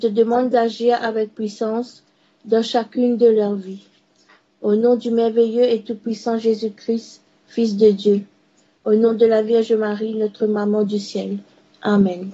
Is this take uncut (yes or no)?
yes